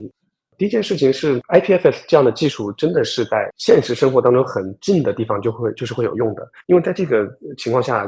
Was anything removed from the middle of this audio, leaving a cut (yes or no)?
yes